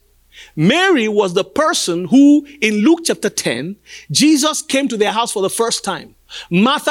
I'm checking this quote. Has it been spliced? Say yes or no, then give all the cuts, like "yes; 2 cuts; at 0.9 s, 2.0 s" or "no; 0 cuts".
no; 0 cuts